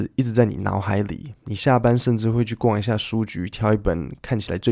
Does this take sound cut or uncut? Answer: uncut